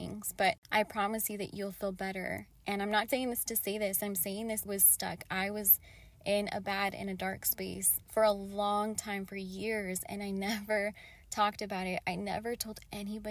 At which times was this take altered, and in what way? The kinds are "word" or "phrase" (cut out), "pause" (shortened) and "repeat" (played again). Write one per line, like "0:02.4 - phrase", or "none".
0:03.1 - word
0:04.6 - phrase
0:08.0 - word